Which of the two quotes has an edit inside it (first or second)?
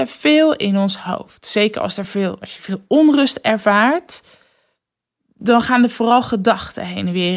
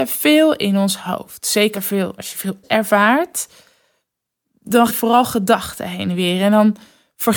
second